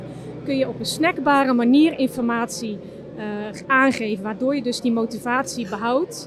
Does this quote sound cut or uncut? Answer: uncut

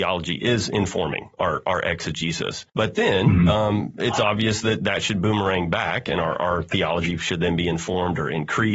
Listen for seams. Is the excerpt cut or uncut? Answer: cut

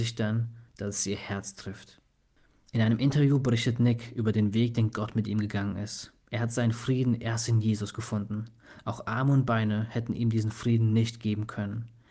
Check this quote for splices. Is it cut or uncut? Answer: cut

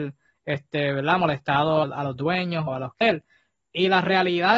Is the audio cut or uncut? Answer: cut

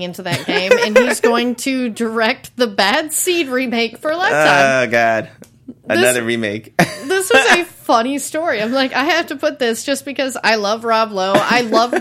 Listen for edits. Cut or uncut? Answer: uncut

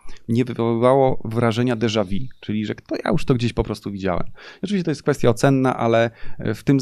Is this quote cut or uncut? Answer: uncut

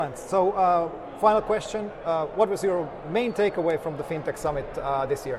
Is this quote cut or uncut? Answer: uncut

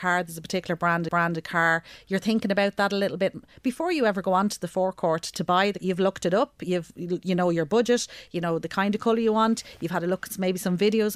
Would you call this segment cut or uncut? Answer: cut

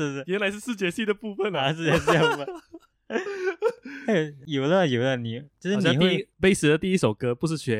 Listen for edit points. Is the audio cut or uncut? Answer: cut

